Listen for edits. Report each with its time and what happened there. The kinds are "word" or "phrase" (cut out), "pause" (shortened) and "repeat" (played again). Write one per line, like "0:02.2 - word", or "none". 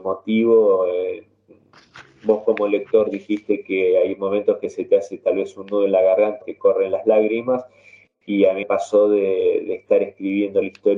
0:06.4 - word
0:08.6 - word